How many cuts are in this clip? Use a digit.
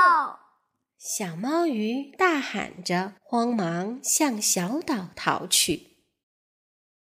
1